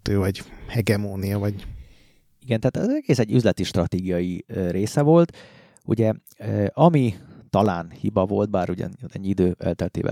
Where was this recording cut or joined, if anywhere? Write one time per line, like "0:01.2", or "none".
none